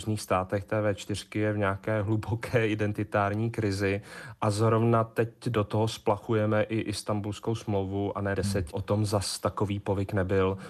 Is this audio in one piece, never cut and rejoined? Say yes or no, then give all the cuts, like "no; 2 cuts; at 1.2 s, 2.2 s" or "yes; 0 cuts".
no; 2 cuts; at 8.3 s, 8.7 s